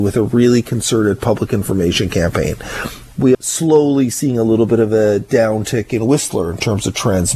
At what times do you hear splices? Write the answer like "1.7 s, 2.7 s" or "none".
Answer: 3.3 s